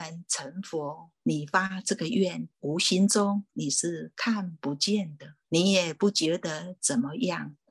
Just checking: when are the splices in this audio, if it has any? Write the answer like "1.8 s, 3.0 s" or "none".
1.2 s, 2.5 s, 5.4 s